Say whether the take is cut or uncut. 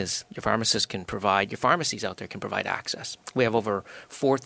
uncut